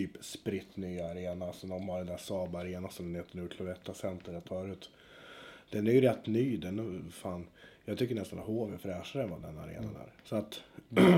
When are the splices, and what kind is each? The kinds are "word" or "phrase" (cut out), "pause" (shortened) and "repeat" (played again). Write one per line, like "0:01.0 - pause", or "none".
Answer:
0:04.5 - word